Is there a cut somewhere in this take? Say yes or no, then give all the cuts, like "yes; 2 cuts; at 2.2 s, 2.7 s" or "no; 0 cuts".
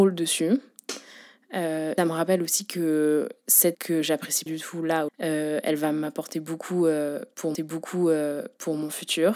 yes; 5 cuts; at 2.0 s, 3.7 s, 4.5 s, 5.1 s, 7.5 s